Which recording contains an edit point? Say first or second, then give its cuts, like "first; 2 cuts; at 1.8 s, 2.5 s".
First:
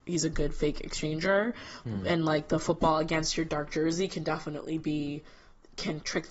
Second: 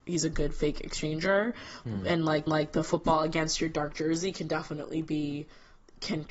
second; 1 cut; at 2.5 s